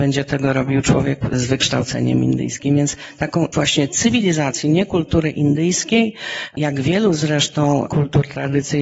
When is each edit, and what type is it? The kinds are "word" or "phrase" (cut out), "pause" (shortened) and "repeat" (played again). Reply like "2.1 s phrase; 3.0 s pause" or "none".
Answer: 3.5 s word